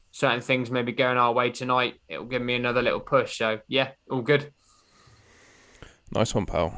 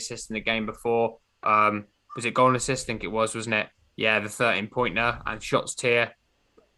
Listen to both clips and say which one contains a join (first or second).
second